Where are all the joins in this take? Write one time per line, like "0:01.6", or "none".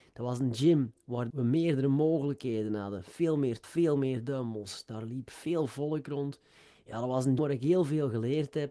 0:01.3
0:03.6
0:07.4